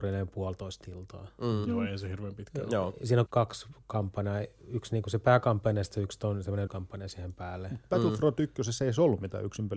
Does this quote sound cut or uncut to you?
cut